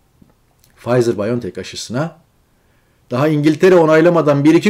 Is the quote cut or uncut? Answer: uncut